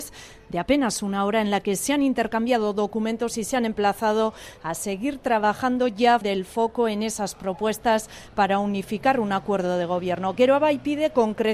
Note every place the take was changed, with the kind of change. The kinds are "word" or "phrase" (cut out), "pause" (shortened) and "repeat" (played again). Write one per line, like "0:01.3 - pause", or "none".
0:06.2 - word